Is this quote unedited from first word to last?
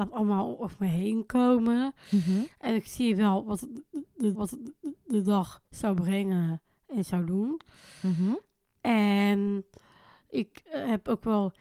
no; 1 cut; at 4.3 s

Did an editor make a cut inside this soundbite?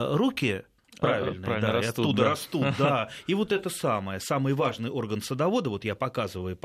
no; 0 cuts

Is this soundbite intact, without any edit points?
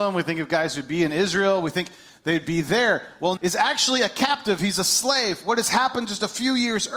no; 1 cut; at 3.4 s

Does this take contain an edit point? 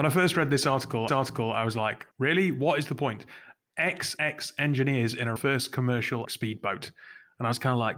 yes; 5 cuts; at 1.1 s, 2.1 s, 4.2 s, 5.4 s, 6.2 s

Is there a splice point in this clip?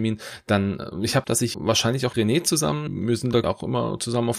yes; 5 cuts; at 1.2 s, 1.5 s, 2.1 s, 2.9 s, 3.4 s

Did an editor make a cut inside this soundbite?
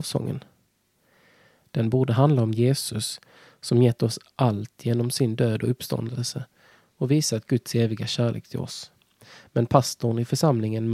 no; 0 cuts

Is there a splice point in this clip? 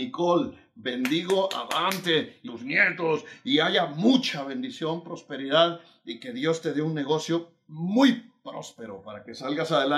yes; 1 cut; at 2.5 s

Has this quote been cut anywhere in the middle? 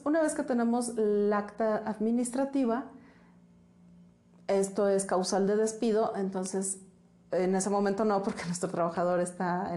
no; 0 cuts

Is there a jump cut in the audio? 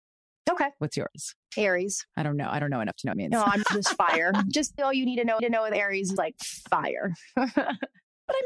yes; 6 cuts; at 2.1 s, 3.1 s, 3.6 s, 4.8 s, 5.4 s, 6.2 s

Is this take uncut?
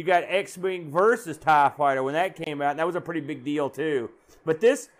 yes; 0 cuts

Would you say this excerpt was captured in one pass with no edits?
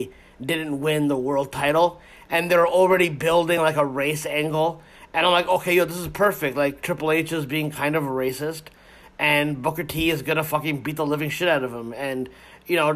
yes; 0 cuts

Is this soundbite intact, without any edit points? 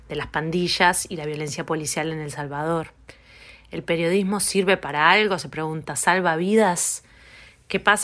yes; 0 cuts

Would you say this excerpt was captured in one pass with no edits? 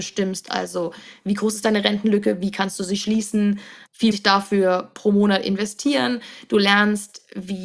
no; 1 cut; at 4.1 s

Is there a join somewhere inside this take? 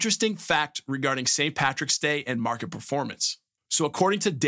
no; 0 cuts

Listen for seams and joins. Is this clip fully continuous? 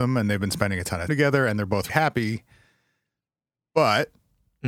no; 2 cuts; at 1.1 s, 1.9 s

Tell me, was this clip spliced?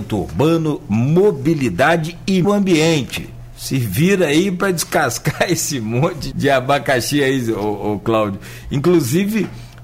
yes; 2 cuts; at 2.4 s, 6.3 s

